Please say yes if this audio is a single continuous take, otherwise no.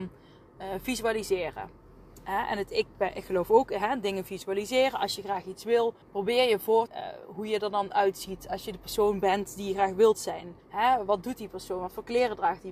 no